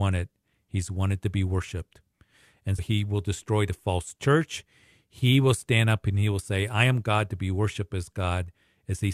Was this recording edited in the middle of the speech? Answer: yes; 1 cut; at 2.8 s

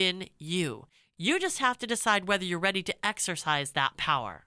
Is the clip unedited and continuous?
yes; 0 cuts

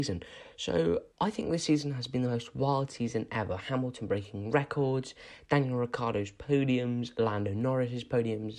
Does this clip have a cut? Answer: yes; 1 cut; at 1.1 s

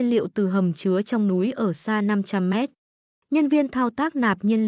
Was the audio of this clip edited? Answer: no; 0 cuts

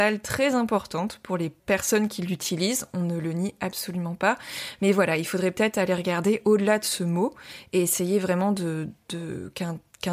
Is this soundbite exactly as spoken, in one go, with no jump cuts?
no; 1 cut; at 1.6 s

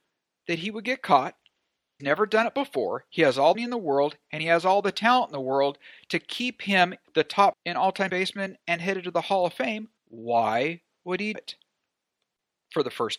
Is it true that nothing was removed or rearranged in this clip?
no; 8 cuts; at 2.0 s, 3.5 s, 7.0 s, 7.5 s, 8.1 s, 8.6 s, 10.0 s, 11.3 s

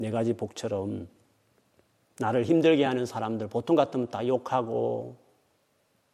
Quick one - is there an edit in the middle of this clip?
no; 0 cuts

